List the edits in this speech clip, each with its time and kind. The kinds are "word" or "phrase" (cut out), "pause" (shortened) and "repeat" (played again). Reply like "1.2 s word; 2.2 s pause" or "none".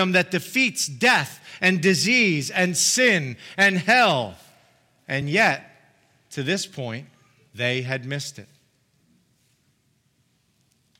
none